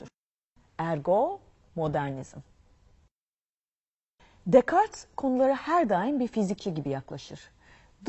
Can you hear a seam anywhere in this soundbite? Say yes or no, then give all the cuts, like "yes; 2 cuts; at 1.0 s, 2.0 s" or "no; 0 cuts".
no; 0 cuts